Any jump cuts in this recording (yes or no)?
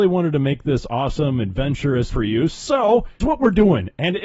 yes